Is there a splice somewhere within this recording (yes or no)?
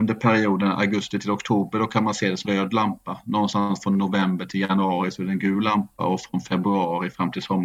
yes